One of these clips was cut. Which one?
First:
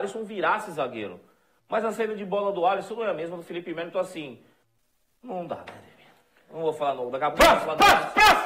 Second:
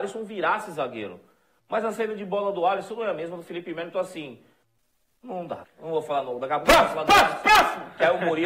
second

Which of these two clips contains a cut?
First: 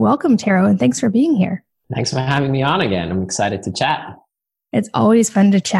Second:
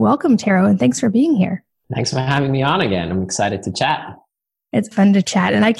second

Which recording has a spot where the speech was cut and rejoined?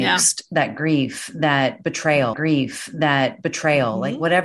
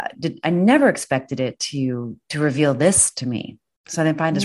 first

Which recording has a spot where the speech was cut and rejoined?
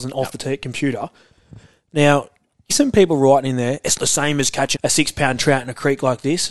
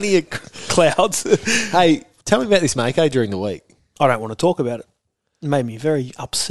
first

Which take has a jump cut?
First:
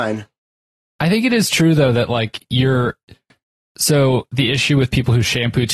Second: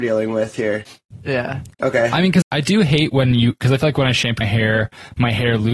second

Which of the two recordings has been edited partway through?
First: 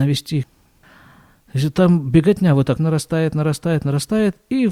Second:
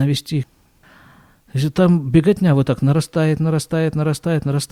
first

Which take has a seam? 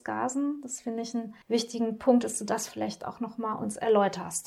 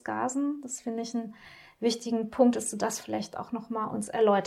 first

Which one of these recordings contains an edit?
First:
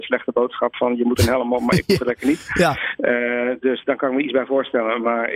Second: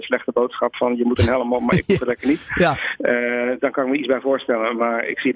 second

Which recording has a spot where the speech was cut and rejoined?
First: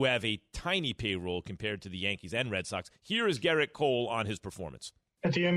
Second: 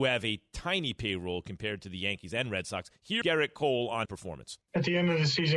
second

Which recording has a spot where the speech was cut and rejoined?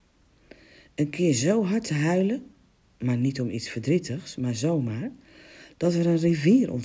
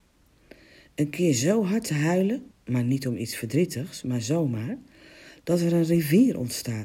second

